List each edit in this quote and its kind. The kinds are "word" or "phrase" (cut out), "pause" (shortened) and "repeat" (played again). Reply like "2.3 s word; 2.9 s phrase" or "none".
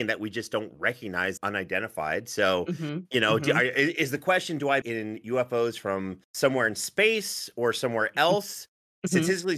1.4 s word; 4.8 s word; 6.2 s pause